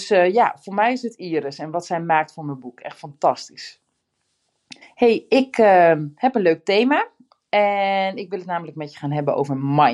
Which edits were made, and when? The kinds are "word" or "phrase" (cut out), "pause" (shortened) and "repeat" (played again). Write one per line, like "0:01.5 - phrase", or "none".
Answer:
0:04.8 - pause